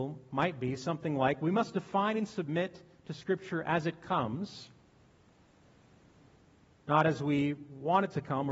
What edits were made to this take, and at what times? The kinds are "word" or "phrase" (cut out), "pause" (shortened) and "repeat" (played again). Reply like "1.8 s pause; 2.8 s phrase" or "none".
none